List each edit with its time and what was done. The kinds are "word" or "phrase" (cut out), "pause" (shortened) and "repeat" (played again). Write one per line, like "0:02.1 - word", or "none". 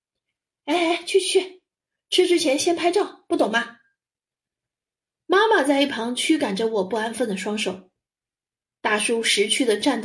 none